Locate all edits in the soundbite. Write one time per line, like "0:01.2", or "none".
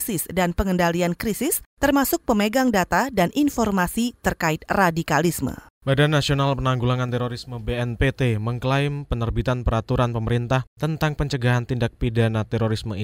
none